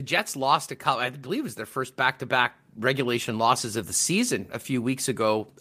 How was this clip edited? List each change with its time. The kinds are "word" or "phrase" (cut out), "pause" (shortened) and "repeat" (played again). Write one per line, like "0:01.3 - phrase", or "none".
none